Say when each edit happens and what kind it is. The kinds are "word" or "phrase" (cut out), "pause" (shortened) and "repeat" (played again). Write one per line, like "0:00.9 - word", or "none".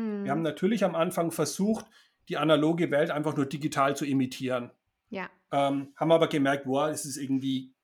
none